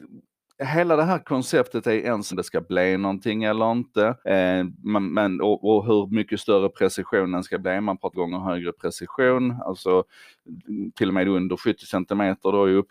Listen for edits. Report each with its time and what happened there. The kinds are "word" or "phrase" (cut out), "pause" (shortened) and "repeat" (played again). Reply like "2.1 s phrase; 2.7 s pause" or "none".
2.3 s phrase; 4.2 s pause; 8.1 s phrase